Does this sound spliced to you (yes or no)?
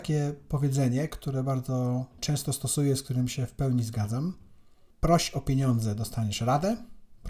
no